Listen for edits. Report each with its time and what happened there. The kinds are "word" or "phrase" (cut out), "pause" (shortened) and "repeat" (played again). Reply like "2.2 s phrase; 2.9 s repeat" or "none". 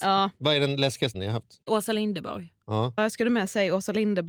1.1 s word; 1.6 s pause; 3.0 s word

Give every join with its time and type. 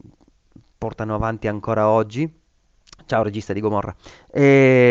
none

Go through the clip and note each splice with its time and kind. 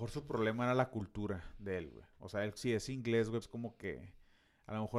2.6 s word; 3.4 s word

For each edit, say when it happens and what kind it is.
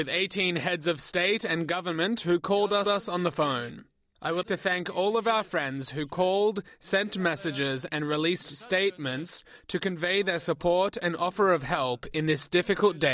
2.8 s repeat; 4.4 s word

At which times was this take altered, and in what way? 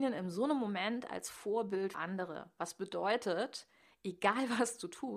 1.9 s word

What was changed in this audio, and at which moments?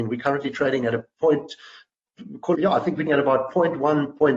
2.5 s word; 3.1 s word

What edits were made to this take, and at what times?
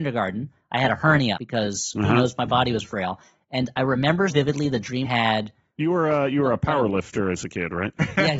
1.4 s word; 2.8 s word; 4.3 s word; 5.0 s word

